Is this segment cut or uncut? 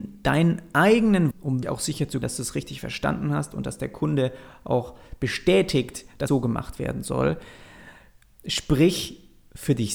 cut